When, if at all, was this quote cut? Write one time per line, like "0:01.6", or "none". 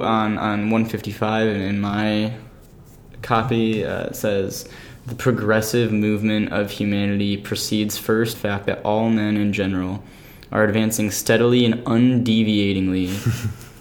0:08.3